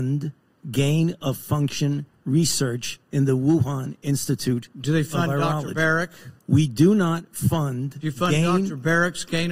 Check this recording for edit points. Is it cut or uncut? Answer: cut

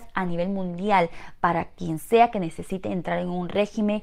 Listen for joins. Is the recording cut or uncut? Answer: uncut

